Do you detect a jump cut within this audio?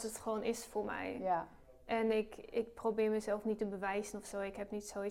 no; 0 cuts

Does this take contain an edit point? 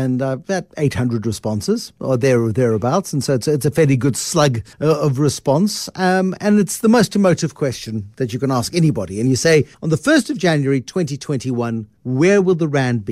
yes; 3 cuts; at 4.7 s, 9.7 s, 12.0 s

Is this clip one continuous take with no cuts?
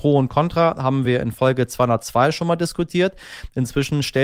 yes; 0 cuts

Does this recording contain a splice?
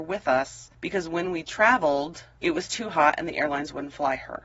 no; 0 cuts

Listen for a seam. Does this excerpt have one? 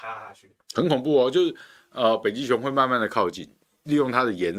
no; 0 cuts

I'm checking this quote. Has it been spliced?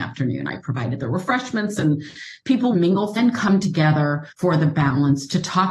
yes; 3 cuts; at 2.7 s, 3.2 s, 4.3 s

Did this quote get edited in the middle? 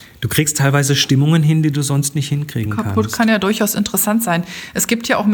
no; 0 cuts

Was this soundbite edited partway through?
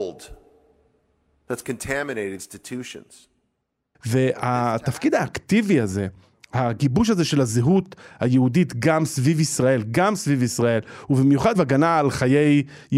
yes; 2 cuts; at 2.4 s, 11.5 s

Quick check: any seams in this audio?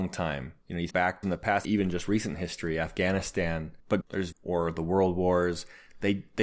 yes; 5 cuts; at 0.9 s, 1.2 s, 1.6 s, 4.0 s, 4.3 s

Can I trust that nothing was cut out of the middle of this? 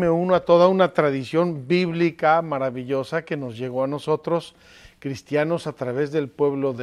yes; 0 cuts

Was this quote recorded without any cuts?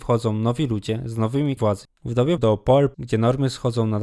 no; 3 cuts; at 1.6 s, 2.4 s, 2.9 s

